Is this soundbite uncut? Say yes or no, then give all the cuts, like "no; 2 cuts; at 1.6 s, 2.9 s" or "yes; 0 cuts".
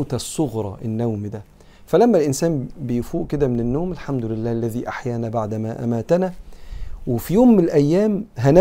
yes; 0 cuts